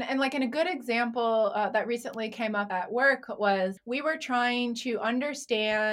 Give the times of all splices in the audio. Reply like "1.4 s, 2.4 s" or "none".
none